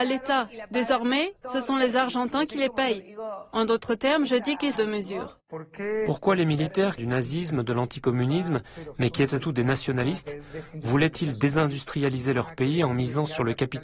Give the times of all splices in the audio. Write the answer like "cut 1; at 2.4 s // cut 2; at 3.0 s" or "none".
cut 1; at 4.8 s // cut 2; at 7.0 s // cut 3; at 9.4 s